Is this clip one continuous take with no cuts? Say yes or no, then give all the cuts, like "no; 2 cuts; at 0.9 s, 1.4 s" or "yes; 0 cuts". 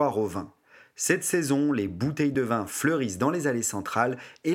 yes; 0 cuts